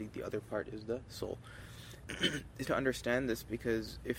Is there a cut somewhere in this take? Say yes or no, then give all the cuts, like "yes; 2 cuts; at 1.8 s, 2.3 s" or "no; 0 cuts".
yes; 2 cuts; at 2.0 s, 2.6 s